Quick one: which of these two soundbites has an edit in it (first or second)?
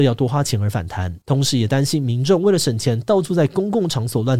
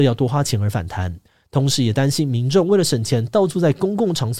first